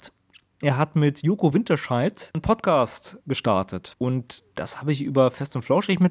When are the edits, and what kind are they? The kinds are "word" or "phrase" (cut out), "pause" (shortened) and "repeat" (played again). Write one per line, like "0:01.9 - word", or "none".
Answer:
none